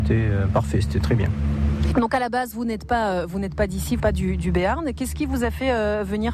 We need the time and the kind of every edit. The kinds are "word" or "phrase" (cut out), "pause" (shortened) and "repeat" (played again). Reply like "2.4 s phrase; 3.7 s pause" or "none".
4.0 s word